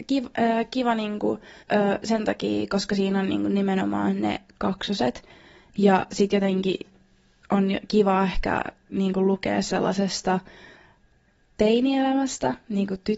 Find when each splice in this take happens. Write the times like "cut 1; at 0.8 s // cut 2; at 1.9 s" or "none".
cut 1; at 1.6 s